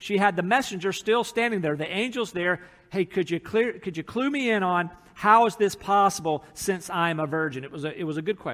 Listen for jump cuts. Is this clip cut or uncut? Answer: uncut